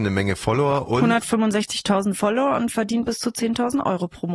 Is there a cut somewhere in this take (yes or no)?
no